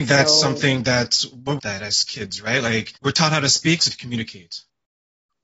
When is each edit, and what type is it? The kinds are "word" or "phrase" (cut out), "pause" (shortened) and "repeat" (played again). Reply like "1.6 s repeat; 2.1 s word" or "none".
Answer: 1.6 s phrase; 3.0 s pause; 3.8 s word